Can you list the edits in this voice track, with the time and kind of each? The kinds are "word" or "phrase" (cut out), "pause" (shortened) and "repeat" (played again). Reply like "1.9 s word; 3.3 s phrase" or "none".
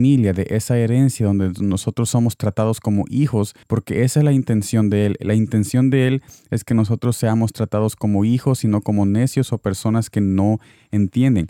3.6 s pause